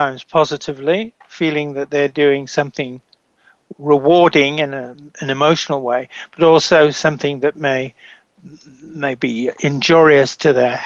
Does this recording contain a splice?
no; 0 cuts

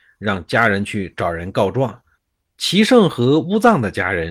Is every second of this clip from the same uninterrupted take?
no; 1 cut; at 2.1 s

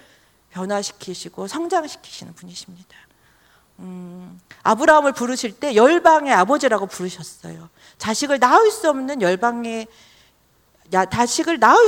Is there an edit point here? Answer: no; 0 cuts

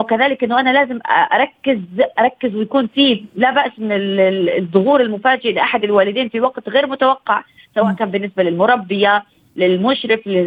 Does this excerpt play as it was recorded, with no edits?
yes; 0 cuts

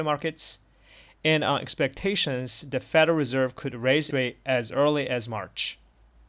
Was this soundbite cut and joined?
yes; 1 cut; at 4.1 s

